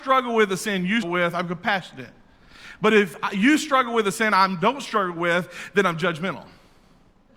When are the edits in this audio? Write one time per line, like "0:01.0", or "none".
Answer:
0:01.0